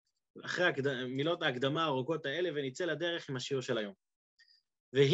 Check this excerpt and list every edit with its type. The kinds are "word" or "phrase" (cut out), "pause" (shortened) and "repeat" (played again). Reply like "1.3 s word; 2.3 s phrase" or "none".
none